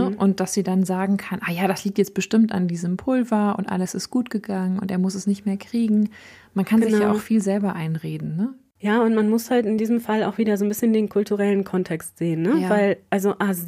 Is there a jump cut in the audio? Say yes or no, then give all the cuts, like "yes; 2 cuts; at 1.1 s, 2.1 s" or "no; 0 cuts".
no; 0 cuts